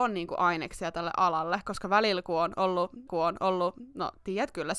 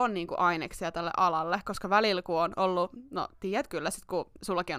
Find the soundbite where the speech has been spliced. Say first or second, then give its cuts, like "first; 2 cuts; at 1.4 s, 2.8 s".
first; 1 cut; at 3.1 s